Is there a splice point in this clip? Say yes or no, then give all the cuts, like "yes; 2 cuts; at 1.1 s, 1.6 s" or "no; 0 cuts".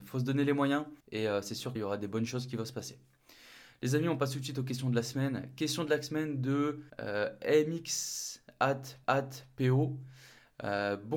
yes; 4 cuts; at 1.0 s, 1.8 s, 6.9 s, 9.0 s